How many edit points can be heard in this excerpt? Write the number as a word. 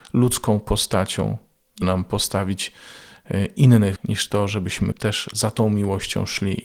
three